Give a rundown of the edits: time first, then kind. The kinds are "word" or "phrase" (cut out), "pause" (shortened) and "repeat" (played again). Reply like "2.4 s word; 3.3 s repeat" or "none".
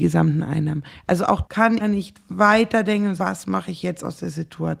1.4 s word; 1.8 s word; 3.2 s word